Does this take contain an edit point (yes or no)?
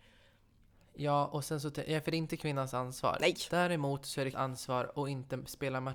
yes